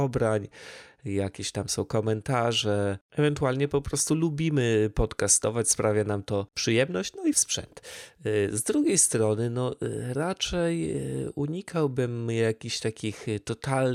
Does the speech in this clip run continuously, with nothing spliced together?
no; 2 cuts; at 3.1 s, 7.3 s

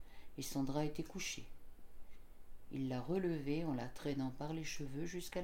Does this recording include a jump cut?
no; 0 cuts

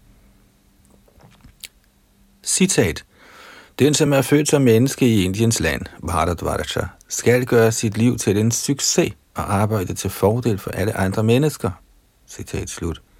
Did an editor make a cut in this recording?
no; 0 cuts

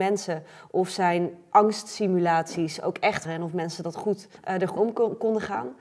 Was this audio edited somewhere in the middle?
yes; 3 cuts; at 3.2 s, 4.4 s, 4.8 s

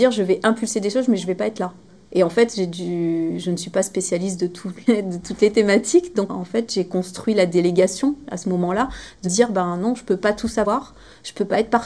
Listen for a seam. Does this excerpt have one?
yes; 3 cuts; at 1.9 s, 4.9 s, 9.2 s

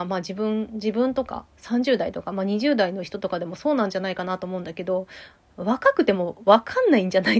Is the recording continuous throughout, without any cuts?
yes; 0 cuts

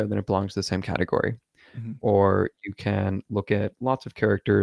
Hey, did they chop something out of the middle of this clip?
no; 0 cuts

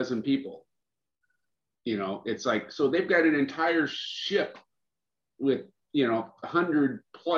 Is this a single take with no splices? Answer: yes; 0 cuts

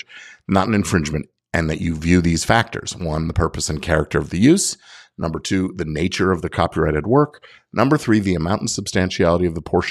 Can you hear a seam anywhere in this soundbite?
no; 0 cuts

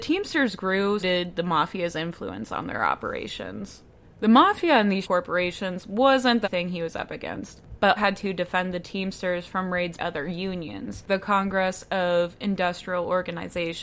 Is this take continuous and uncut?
no; 6 cuts; at 1.0 s, 5.0 s, 6.4 s, 8.0 s, 10.0 s, 11.1 s

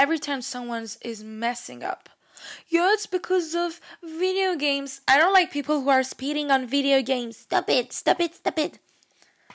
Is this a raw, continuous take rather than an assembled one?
yes; 0 cuts

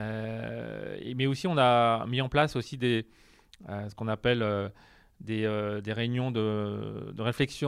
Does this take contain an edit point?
no; 0 cuts

